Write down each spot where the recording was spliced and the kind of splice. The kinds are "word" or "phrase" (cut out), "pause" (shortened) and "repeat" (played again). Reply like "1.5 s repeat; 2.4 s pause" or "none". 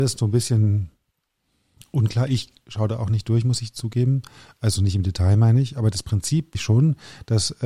6.5 s word